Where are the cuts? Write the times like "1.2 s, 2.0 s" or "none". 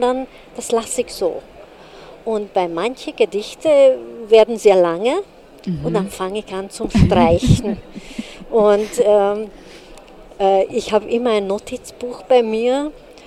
none